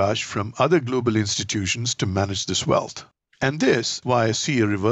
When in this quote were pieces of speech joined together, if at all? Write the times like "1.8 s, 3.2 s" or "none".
3.1 s, 4.0 s